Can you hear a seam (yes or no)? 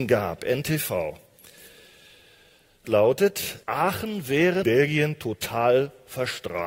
yes